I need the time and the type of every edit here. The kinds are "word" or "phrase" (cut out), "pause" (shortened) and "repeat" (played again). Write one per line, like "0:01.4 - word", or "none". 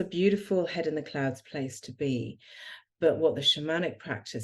none